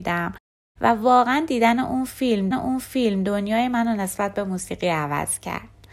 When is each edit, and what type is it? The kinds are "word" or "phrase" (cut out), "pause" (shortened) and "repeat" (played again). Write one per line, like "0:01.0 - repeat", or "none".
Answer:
0:02.5 - repeat